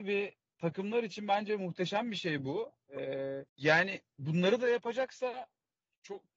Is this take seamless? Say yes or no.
no